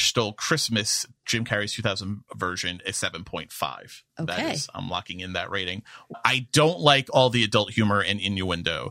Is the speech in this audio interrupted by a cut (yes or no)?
yes